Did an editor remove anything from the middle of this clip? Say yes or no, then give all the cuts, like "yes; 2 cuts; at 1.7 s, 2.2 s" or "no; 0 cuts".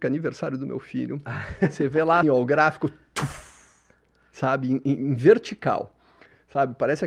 yes; 1 cut; at 2.2 s